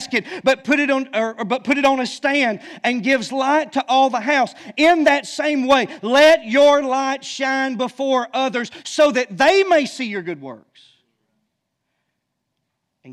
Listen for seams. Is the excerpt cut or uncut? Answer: uncut